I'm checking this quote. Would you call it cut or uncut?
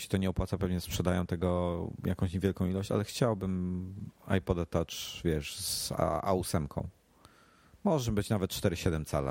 uncut